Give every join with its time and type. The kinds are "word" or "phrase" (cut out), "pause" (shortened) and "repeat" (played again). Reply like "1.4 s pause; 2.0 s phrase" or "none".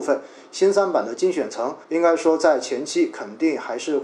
1.8 s pause